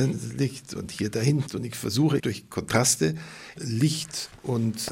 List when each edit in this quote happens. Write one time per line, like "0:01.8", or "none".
0:01.5
0:02.2
0:03.6